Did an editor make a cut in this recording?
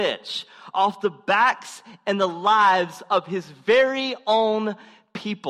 no; 0 cuts

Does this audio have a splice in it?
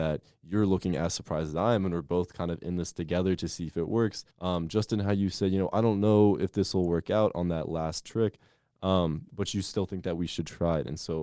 yes; 1 cut; at 4.3 s

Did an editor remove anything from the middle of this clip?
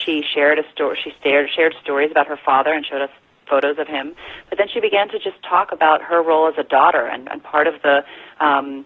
no; 0 cuts

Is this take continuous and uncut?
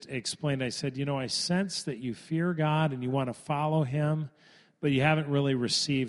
yes; 0 cuts

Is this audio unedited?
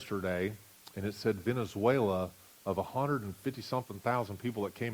yes; 0 cuts

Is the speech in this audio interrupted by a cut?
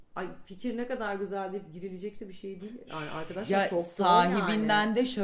no; 0 cuts

